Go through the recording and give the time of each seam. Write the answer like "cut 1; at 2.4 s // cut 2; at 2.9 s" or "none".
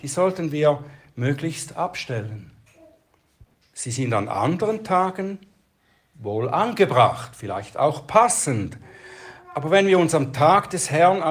cut 1; at 3.4 s